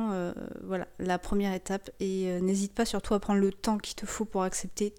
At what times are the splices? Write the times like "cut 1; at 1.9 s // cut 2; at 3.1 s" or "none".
none